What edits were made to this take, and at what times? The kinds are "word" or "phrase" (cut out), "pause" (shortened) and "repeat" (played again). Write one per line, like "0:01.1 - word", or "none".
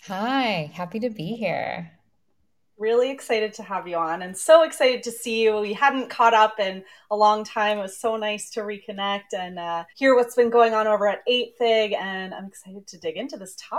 0:09.9 - pause